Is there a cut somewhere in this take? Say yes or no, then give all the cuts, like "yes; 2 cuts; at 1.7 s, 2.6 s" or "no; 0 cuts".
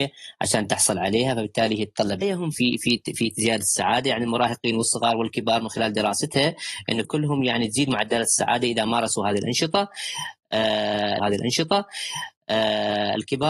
yes; 4 cuts; at 2.2 s, 2.5 s, 7.0 s, 11.2 s